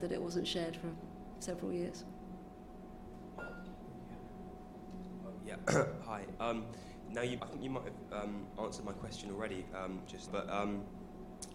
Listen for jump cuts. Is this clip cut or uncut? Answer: cut